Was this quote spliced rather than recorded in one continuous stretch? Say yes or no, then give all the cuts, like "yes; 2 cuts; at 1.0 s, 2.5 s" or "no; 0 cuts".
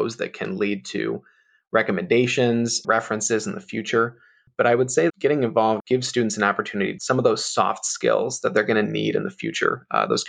yes; 4 cuts; at 2.8 s, 5.1 s, 5.8 s, 7.0 s